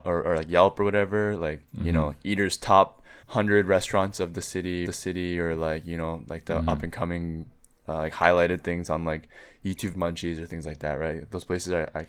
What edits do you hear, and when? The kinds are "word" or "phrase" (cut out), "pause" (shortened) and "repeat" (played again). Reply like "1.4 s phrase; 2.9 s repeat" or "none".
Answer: 1.7 s pause; 3.2 s pause; 4.9 s repeat; 9.9 s phrase